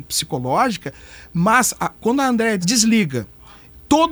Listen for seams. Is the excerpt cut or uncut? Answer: cut